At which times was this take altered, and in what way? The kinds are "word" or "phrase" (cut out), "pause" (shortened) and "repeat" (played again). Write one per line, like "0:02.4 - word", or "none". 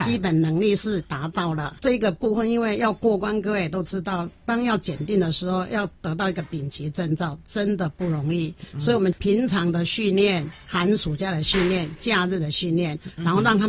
none